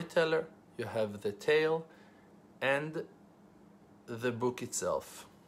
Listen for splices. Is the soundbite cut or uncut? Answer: uncut